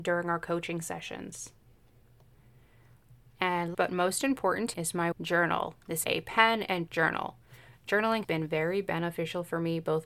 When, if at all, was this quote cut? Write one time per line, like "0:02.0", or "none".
0:03.7
0:04.7
0:05.1
0:06.0
0:06.9
0:08.2